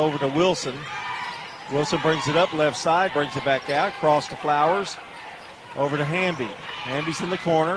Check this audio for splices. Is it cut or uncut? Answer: cut